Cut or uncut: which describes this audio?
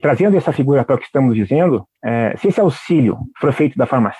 cut